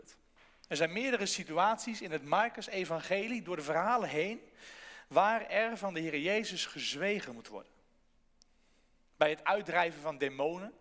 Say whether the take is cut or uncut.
uncut